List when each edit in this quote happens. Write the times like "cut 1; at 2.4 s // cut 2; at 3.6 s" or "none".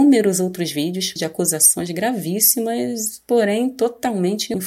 cut 1; at 1.2 s

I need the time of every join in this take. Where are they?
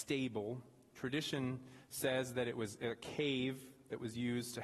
none

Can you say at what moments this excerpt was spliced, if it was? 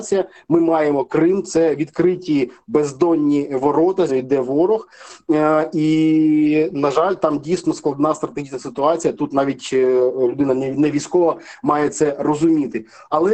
cut 1; at 4.1 s

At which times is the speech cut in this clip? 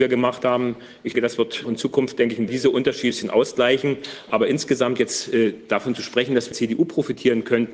cut 1; at 1.1 s // cut 2; at 1.6 s // cut 3; at 2.5 s // cut 4; at 3.1 s // cut 5; at 6.5 s

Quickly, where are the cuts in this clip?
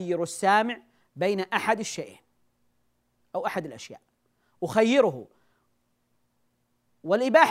none

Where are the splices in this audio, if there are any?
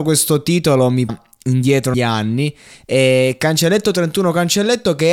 cut 1; at 1.1 s // cut 2; at 1.9 s

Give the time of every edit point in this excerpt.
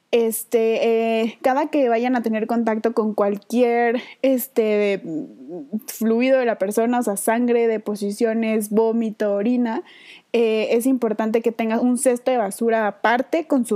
none

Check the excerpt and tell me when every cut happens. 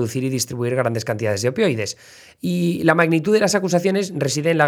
none

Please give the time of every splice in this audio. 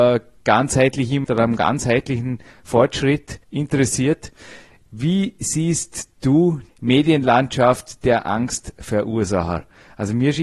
cut 1; at 1.2 s // cut 2; at 3.4 s // cut 3; at 6.7 s

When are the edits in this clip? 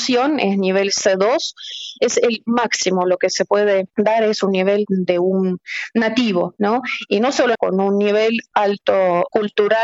cut 1; at 7.5 s

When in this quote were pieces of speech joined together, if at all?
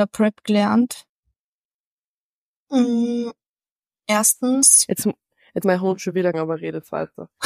cut 1; at 5.6 s // cut 2; at 6.3 s

